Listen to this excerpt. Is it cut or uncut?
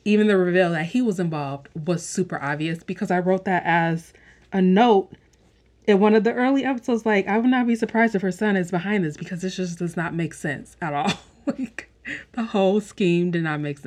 uncut